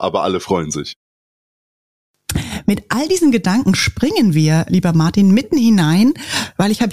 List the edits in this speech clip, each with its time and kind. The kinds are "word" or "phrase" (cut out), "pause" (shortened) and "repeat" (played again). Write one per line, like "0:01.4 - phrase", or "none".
0:04.7 - word